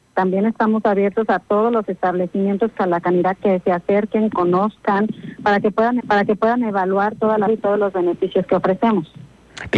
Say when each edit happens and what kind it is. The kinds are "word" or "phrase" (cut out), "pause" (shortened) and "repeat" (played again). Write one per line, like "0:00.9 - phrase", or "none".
0:02.8 - phrase
0:04.3 - phrase
0:06.0 - repeat
0:07.5 - word